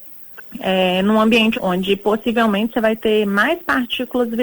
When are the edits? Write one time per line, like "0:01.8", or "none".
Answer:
0:01.5